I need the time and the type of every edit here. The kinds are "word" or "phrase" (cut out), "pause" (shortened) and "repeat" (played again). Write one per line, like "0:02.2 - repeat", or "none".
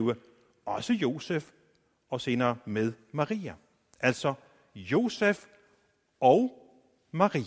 none